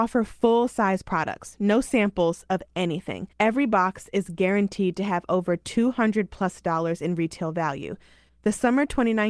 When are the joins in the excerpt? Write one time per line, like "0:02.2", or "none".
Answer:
0:03.3
0:08.3